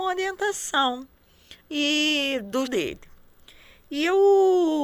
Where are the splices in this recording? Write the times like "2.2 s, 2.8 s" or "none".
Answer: 1.6 s, 2.7 s

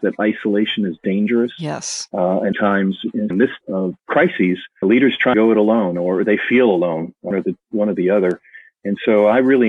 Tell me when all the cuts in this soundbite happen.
2.5 s, 3.3 s, 3.6 s, 4.8 s, 5.3 s, 7.3 s

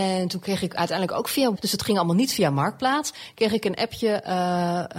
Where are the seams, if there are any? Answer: 1.6 s

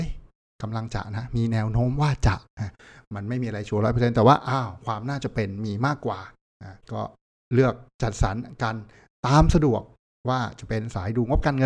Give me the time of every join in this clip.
6.8 s

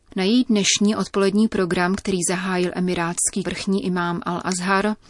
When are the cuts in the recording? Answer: 3.4 s

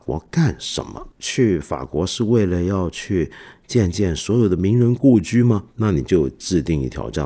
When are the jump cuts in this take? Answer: 5.7 s

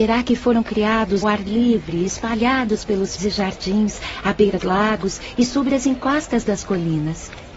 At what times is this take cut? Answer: 1.2 s, 3.2 s, 4.6 s

